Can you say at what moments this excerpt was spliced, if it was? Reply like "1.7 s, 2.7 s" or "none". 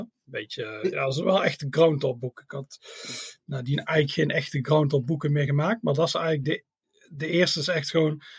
none